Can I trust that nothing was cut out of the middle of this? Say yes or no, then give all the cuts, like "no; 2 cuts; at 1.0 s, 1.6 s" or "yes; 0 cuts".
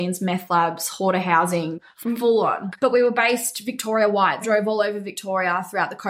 no; 1 cut; at 4.4 s